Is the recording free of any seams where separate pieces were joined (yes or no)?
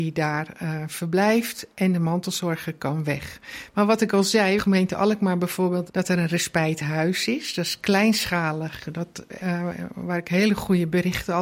no